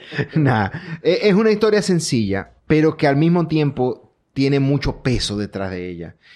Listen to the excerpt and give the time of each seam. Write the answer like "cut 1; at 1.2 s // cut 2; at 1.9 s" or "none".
cut 1; at 2.6 s